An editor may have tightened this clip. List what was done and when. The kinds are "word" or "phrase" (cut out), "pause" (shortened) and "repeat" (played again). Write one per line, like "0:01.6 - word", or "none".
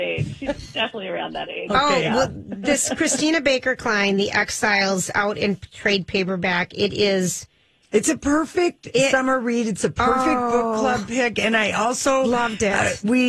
none

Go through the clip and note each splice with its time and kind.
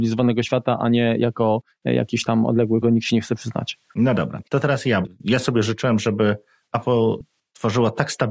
0:02.8 - phrase

